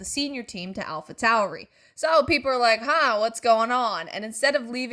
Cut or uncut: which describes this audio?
uncut